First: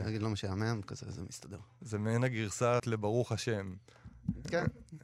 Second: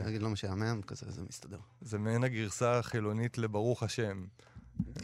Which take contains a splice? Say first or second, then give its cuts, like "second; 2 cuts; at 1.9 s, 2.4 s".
first; 1 cut; at 2.8 s